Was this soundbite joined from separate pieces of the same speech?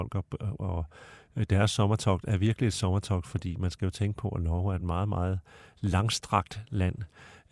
no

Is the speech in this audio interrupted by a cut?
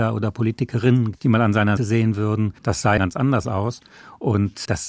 yes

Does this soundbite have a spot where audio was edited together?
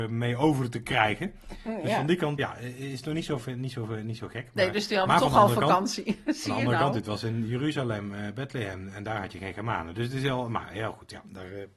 yes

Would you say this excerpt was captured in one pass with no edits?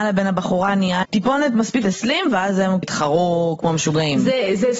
no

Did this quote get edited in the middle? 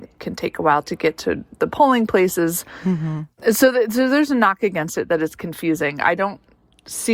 no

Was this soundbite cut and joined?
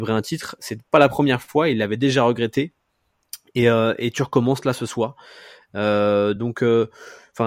no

